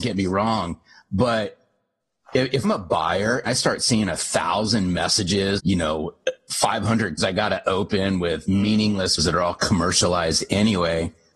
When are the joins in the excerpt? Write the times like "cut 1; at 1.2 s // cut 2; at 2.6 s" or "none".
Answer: cut 1; at 2.6 s // cut 2; at 3.5 s // cut 3; at 5.6 s // cut 4; at 7.2 s // cut 5; at 9.2 s